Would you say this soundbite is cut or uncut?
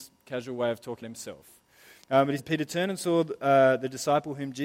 cut